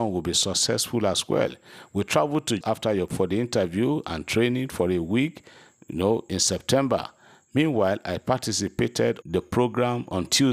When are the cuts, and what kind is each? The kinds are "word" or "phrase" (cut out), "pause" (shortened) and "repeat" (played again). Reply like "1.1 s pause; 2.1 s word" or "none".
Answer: 2.6 s word; 3.1 s word; 9.2 s word